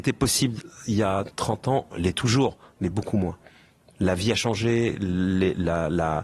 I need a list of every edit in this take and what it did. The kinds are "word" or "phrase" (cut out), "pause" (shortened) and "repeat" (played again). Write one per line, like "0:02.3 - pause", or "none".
none